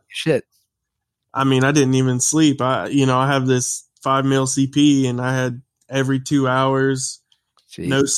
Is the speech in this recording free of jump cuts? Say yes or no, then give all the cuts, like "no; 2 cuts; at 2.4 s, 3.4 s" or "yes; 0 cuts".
yes; 0 cuts